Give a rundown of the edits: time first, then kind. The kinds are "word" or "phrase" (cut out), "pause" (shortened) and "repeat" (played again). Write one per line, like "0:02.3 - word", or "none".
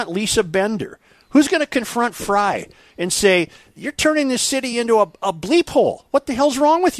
none